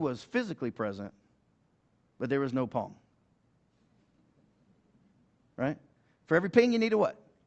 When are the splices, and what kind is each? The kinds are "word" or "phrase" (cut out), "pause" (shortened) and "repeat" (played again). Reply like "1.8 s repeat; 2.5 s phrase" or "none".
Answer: none